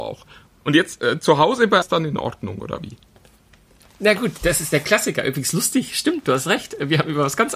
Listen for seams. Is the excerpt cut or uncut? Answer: cut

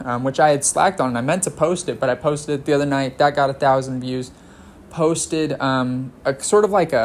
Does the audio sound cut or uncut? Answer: uncut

